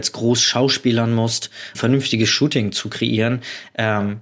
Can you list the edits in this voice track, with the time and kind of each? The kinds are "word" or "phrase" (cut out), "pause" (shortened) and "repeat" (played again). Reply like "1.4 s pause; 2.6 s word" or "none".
1.7 s word